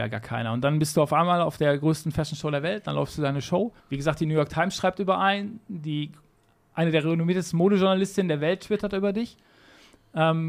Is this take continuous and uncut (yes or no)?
no